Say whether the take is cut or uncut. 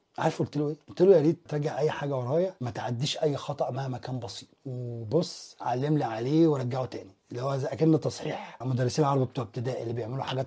cut